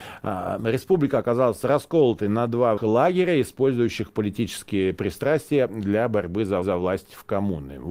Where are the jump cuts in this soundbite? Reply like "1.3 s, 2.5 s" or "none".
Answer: 2.8 s, 6.6 s

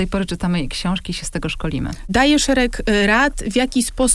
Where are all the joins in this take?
none

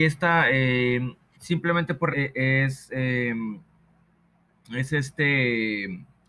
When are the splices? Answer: 1.3 s, 2.1 s

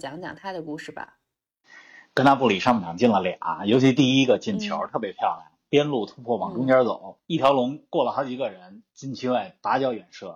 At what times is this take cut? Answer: 7.2 s

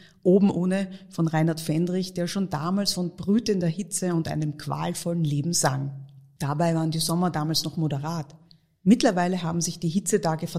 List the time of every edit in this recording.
none

